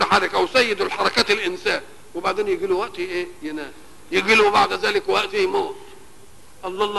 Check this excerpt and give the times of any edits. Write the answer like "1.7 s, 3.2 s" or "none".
none